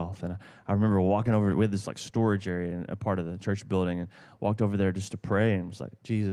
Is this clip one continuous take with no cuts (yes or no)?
yes